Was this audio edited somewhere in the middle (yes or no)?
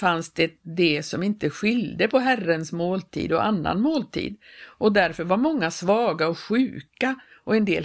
no